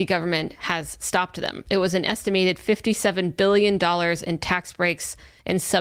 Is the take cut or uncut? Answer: uncut